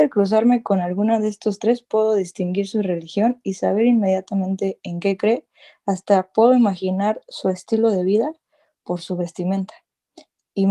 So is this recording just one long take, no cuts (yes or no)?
yes